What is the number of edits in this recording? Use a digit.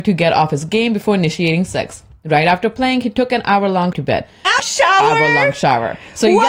2